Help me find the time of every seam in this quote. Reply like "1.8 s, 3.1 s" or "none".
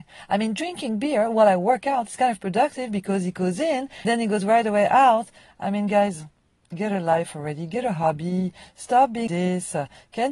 4.0 s, 9.3 s